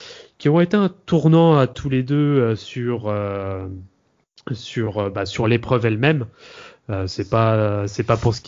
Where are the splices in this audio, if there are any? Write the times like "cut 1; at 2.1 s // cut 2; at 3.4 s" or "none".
none